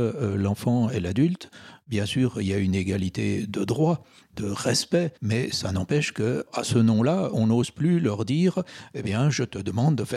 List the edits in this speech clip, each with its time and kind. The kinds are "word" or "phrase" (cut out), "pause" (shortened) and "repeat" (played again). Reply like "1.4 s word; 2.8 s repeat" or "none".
5.2 s pause; 7.3 s word

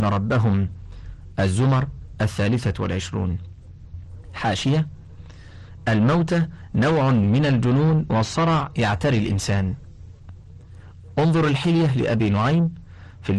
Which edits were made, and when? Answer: none

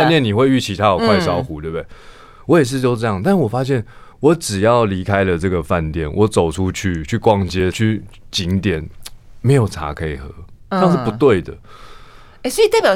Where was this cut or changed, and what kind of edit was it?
4.1 s pause

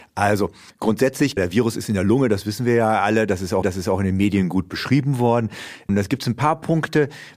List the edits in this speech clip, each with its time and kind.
1.4 s word; 3.6 s repeat

